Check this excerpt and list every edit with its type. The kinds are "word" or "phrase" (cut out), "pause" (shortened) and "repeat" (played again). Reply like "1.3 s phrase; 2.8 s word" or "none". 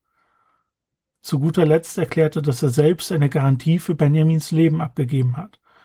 none